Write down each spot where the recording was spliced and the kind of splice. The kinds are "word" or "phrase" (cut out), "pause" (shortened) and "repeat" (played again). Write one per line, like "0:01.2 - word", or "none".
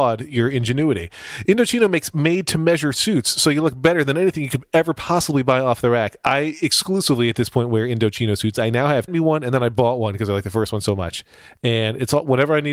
0:09.1 - phrase